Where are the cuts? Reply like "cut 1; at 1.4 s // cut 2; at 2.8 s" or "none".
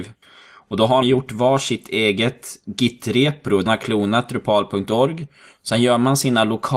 cut 1; at 1.0 s // cut 2; at 3.7 s